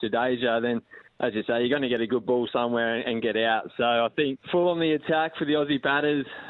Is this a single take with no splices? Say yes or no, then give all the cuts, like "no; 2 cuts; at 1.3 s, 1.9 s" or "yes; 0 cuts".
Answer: no; 2 cuts; at 1.1 s, 4.4 s